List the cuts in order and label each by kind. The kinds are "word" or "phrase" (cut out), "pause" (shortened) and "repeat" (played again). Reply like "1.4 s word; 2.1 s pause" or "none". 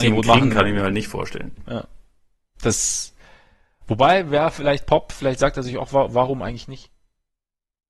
none